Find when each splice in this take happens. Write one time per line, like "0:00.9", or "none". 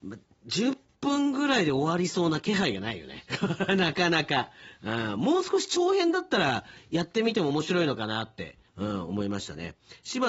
0:03.3
0:08.7